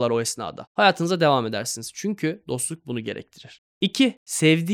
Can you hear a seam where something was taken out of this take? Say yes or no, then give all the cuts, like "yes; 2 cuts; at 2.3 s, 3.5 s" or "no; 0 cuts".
no; 0 cuts